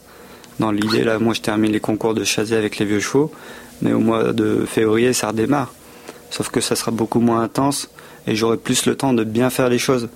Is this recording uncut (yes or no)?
yes